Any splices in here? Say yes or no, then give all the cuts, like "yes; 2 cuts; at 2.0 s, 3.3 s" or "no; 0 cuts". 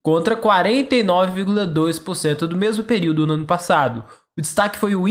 no; 0 cuts